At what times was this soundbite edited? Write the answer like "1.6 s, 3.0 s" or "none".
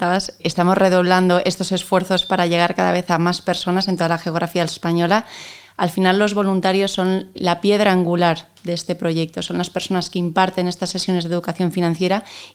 none